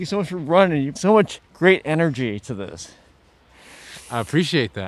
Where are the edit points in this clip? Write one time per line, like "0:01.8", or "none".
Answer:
0:01.0
0:01.5